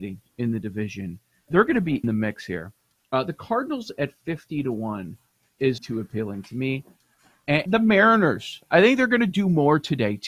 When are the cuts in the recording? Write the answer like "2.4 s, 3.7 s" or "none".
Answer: 1.5 s, 2.0 s, 5.8 s, 7.7 s